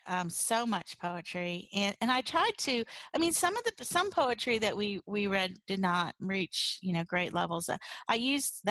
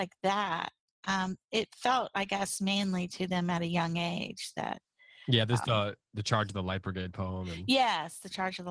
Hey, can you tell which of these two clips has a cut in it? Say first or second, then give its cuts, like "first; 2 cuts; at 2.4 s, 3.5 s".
first; 2 cuts; at 2.0 s, 6.2 s